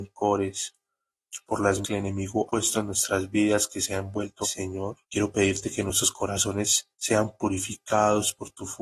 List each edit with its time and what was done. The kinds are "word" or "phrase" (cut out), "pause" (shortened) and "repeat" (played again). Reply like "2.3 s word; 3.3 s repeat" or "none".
1.8 s word; 2.5 s word; 4.4 s word; 5.0 s pause; 6.9 s pause